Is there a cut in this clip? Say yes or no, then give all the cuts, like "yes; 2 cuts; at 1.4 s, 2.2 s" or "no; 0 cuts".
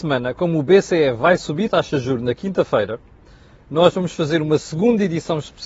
yes; 1 cut; at 1.7 s